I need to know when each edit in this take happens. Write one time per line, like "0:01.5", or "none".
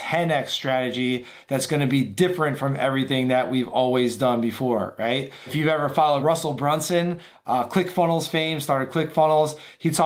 none